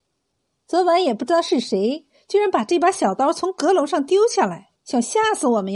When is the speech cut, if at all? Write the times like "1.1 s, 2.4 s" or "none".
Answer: 4.8 s